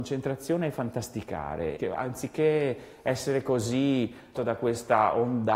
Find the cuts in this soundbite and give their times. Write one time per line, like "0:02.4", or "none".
0:01.8
0:04.4

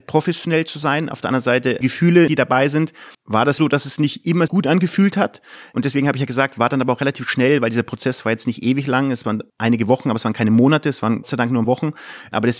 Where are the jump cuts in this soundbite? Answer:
0:01.8
0:02.3
0:03.1
0:03.6
0:04.5
0:11.2
0:11.6

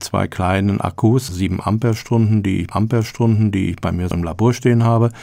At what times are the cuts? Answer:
0:01.3
0:02.7
0:04.1

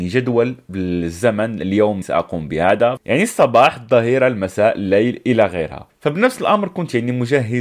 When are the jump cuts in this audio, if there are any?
0:02.0

